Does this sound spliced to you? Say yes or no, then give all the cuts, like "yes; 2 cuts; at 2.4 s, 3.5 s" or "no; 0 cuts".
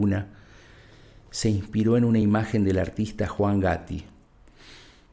no; 0 cuts